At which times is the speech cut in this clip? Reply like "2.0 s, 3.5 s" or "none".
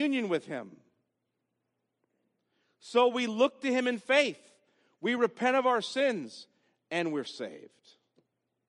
none